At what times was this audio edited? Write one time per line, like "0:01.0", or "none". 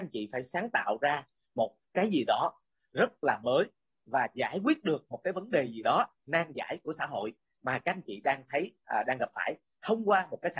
none